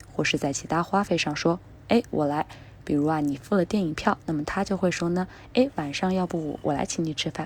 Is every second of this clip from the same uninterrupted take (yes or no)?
yes